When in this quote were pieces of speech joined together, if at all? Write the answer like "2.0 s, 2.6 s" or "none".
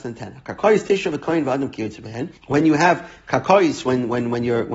2.4 s